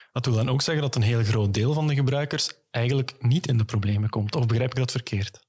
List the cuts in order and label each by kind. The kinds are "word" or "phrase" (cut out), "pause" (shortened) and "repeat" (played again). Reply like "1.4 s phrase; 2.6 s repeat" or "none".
none